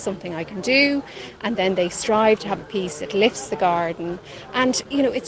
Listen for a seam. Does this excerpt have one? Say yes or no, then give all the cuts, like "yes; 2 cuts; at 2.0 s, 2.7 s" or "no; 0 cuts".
no; 0 cuts